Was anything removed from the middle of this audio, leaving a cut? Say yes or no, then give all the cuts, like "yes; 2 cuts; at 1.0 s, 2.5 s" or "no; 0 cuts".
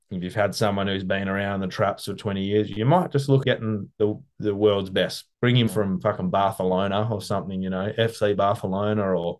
yes; 3 cuts; at 3.4 s, 3.9 s, 5.7 s